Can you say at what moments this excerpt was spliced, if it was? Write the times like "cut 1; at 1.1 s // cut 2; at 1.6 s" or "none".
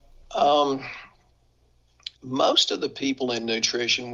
cut 1; at 2.2 s